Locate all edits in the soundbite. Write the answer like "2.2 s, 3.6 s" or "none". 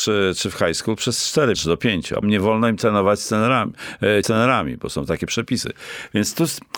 1.5 s, 2.2 s, 4.2 s